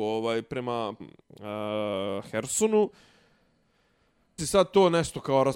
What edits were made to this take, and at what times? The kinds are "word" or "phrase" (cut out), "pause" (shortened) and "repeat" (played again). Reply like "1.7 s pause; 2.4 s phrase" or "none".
1.0 s word; 4.4 s word